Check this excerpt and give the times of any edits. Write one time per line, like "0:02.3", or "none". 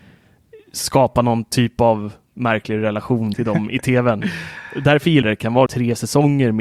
0:03.3
0:05.2
0:05.7